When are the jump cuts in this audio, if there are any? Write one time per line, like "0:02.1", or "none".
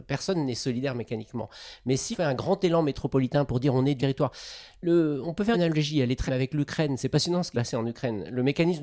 0:02.1
0:04.0
0:05.5
0:06.3
0:07.5